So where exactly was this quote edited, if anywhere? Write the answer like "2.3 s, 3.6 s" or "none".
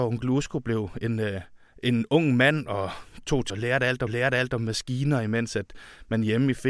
1.7 s, 3.5 s, 4.1 s